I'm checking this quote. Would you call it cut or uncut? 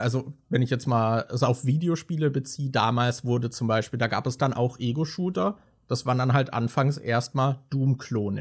uncut